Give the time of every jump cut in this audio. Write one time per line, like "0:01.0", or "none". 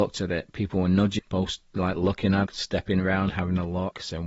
0:01.2
0:02.5